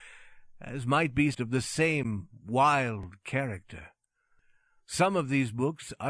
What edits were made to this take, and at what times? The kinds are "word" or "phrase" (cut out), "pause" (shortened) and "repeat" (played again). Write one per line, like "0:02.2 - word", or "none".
0:01.3 - word